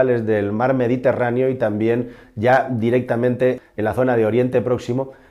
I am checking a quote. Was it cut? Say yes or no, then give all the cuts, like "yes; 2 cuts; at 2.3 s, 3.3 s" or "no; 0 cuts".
no; 0 cuts